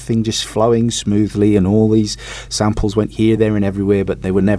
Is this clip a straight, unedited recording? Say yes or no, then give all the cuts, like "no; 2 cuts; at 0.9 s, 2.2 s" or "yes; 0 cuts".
yes; 0 cuts